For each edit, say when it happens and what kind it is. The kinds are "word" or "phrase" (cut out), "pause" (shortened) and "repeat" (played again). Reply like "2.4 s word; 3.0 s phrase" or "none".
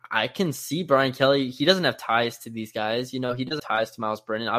3.6 s word